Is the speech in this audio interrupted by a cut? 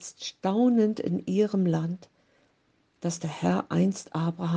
no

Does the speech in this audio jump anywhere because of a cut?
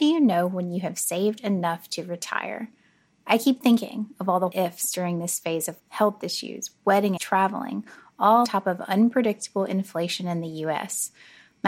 yes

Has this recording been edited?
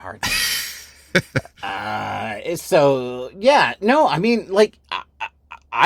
no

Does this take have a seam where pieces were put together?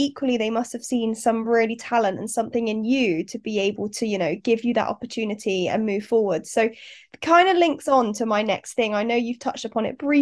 no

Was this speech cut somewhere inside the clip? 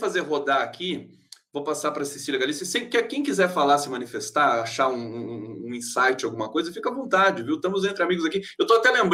no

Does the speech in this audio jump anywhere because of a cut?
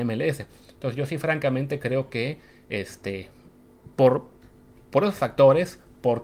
no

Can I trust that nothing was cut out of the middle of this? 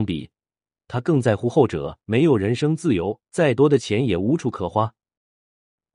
no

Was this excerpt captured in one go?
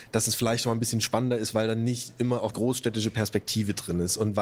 no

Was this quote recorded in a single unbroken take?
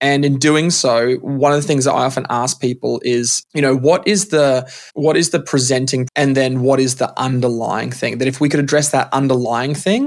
no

